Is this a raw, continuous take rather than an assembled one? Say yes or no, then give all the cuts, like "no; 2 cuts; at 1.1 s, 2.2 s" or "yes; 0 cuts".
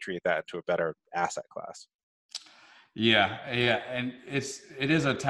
yes; 0 cuts